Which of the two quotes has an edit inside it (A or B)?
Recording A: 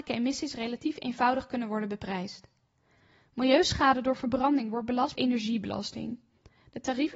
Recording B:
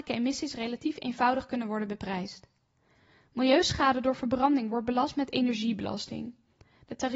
A